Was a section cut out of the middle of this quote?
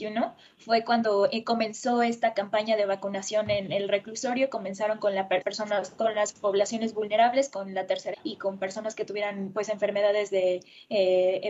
yes; 2 cuts; at 5.4 s, 8.1 s

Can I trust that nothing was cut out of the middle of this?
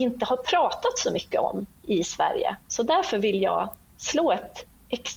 no; 1 cut; at 2.6 s

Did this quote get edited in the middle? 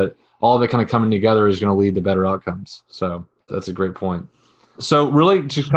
yes; 1 cut; at 3.4 s

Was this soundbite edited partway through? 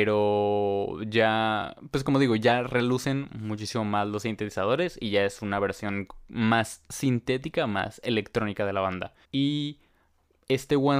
yes; 1 cut; at 9.2 s

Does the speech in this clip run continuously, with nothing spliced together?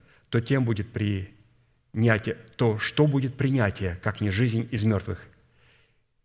yes; 0 cuts

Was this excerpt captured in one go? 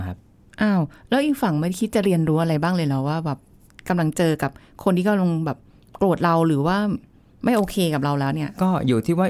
yes; 0 cuts

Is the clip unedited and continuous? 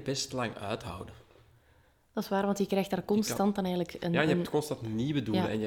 yes; 0 cuts

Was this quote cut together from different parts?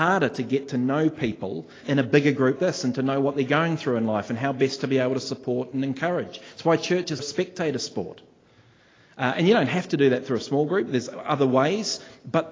yes; 3 cuts; at 1.8 s, 2.6 s, 7.2 s

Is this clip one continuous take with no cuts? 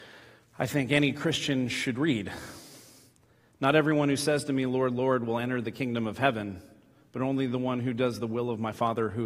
yes; 0 cuts

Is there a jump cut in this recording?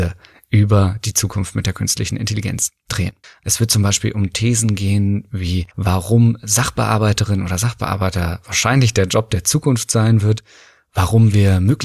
yes; 2 cuts; at 3.2 s, 5.7 s

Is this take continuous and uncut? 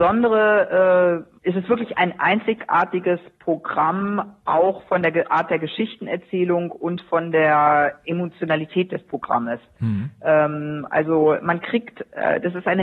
no; 1 cut; at 1.4 s

